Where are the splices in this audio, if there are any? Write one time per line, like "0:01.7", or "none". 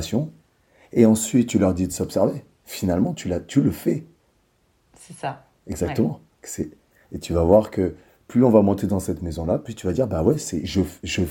none